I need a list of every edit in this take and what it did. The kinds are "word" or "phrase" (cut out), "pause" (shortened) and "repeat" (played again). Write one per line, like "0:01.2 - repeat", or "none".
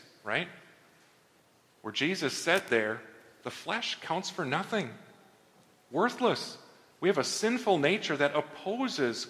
none